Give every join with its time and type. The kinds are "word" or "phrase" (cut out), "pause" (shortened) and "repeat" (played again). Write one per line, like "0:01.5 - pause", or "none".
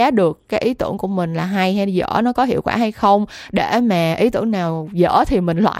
none